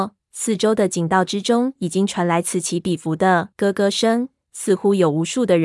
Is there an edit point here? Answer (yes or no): yes